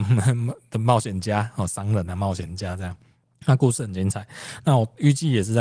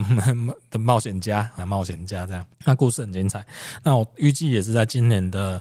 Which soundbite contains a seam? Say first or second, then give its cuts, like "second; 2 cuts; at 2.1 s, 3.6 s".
second; 2 cuts; at 1.6 s, 2.5 s